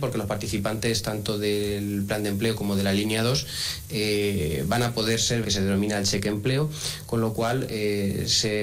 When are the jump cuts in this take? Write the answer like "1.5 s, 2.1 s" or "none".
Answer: 5.4 s